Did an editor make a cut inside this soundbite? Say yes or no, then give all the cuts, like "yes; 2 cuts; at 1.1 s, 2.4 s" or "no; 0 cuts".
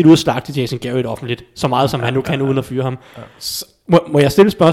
no; 0 cuts